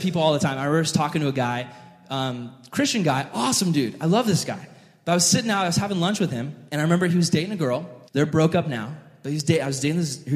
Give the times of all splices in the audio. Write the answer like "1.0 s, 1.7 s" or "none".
6.7 s, 8.1 s